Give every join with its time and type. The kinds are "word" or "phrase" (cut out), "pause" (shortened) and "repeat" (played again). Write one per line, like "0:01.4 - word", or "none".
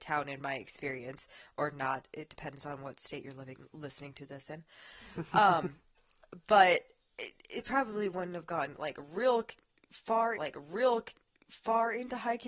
0:10.4 - repeat